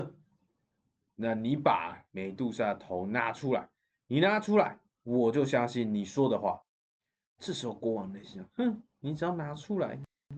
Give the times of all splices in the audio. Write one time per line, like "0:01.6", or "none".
none